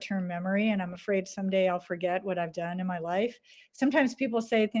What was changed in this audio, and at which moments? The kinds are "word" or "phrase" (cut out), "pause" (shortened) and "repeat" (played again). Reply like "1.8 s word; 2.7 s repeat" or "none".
none